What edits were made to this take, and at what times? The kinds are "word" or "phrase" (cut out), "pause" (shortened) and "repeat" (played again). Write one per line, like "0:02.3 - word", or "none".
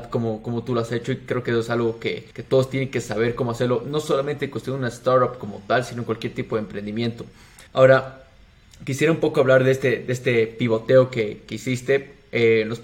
0:02.3 - pause
0:07.7 - pause